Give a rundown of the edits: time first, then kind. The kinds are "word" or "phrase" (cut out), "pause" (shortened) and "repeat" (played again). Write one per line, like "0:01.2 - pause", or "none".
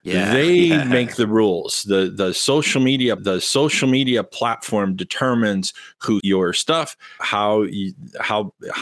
0:03.2 - repeat
0:06.2 - word
0:07.2 - word